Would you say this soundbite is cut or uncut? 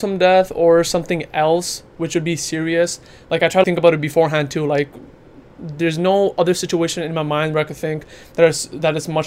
cut